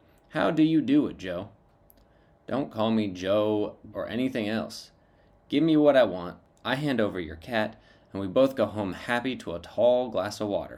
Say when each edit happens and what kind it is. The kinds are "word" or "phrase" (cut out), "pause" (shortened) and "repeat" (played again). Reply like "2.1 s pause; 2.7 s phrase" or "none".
3.9 s word